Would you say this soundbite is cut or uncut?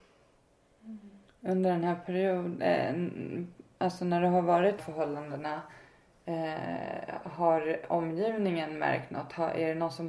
cut